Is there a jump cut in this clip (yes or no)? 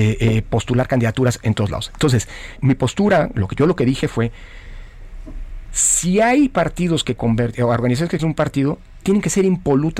yes